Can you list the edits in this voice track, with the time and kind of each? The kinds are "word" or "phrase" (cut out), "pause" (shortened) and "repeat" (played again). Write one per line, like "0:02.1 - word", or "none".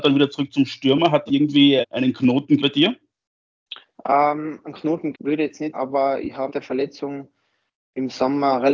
0:01.3 - word
0:01.8 - word
0:02.6 - word
0:05.1 - word
0:05.7 - word
0:06.5 - word